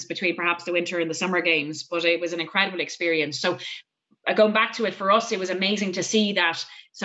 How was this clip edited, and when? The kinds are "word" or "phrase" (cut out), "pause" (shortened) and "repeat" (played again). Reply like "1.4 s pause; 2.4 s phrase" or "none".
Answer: none